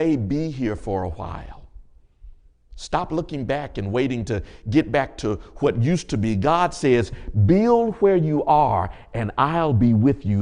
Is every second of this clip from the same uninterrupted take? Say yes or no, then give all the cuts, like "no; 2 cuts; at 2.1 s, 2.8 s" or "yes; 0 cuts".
yes; 0 cuts